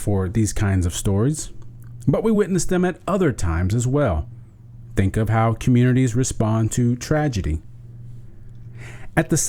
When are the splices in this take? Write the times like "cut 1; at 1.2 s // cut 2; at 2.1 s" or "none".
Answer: none